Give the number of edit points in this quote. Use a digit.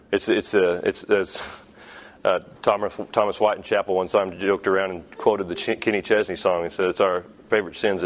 0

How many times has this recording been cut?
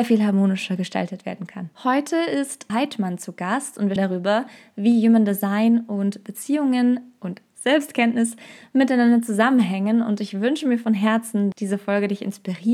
3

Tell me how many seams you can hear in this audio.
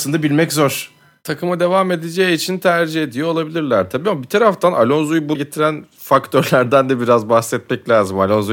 1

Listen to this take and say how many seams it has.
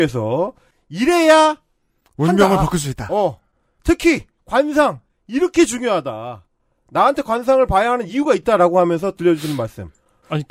0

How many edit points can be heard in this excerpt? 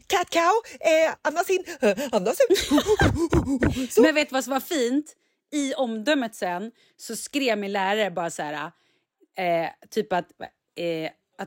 0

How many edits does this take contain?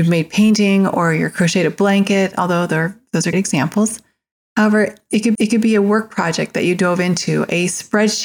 2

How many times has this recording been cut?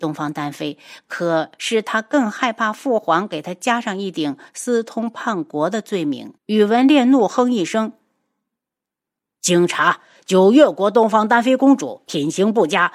1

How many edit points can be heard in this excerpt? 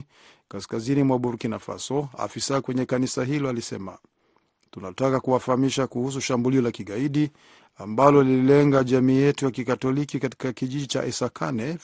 0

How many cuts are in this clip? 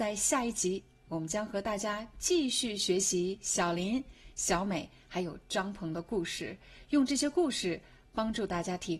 0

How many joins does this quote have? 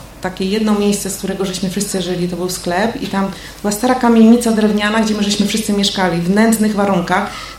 0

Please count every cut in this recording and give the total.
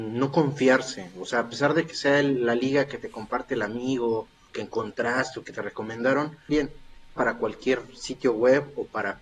3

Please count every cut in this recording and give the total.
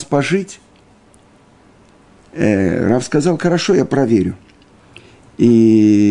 0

